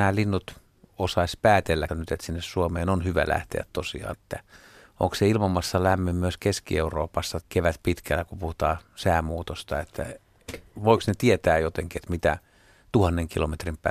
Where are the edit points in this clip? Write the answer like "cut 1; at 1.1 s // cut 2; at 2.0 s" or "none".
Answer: cut 1; at 1.9 s // cut 2; at 4.1 s // cut 3; at 7.4 s